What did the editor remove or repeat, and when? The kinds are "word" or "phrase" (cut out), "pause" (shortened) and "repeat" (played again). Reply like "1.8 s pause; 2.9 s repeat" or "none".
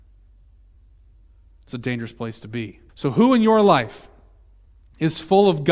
2.9 s pause